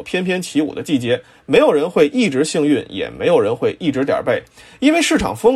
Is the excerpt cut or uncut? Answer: uncut